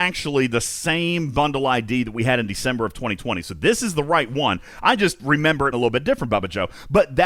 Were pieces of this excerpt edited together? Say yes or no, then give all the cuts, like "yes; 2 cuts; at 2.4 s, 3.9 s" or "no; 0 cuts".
yes; 1 cut; at 5.7 s